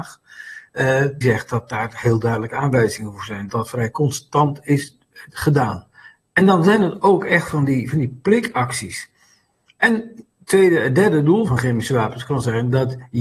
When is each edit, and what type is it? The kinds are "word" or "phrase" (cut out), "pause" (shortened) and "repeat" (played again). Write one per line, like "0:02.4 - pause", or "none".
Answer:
0:01.2 - word
0:03.5 - word
0:11.5 - word